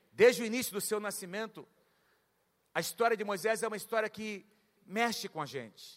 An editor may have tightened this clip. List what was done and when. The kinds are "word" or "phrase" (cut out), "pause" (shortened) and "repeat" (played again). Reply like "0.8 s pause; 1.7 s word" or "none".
none